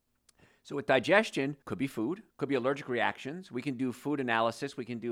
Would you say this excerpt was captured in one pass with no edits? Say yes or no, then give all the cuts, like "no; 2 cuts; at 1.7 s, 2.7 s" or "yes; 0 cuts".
no; 2 cuts; at 1.6 s, 2.3 s